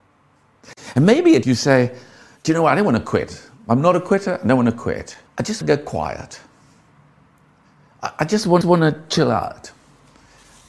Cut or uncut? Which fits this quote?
cut